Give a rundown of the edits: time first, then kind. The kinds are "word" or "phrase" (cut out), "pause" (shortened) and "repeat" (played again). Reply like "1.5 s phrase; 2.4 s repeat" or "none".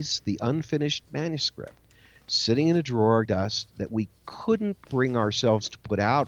3.3 s word; 4.8 s word